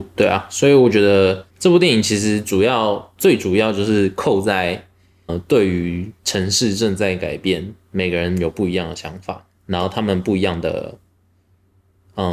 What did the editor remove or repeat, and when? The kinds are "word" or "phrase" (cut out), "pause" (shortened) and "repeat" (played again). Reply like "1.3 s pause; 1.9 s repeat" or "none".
1.5 s pause; 5.3 s word; 6.2 s pause